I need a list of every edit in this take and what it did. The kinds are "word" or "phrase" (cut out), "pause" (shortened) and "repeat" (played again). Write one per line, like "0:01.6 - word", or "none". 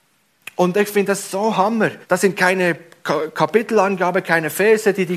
0:02.0 - pause